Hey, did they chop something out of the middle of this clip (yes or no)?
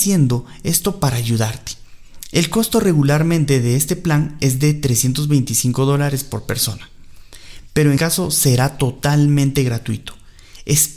yes